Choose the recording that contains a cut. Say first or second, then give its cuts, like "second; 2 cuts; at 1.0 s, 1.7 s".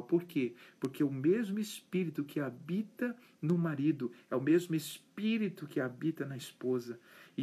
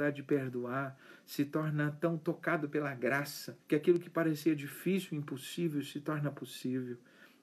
second; 1 cut; at 3.6 s